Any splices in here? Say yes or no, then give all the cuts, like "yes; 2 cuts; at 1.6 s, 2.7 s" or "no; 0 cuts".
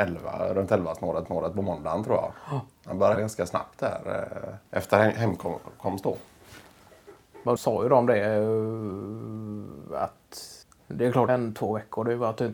yes; 6 cuts; at 1.3 s, 3.2 s, 4.7 s, 7.6 s, 10.6 s, 11.3 s